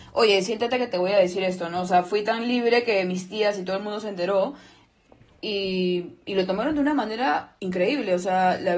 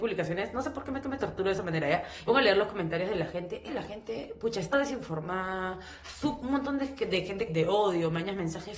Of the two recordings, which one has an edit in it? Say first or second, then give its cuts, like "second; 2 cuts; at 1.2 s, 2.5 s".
second; 5 cuts; at 1.0 s, 2.3 s, 3.7 s, 4.7 s, 7.5 s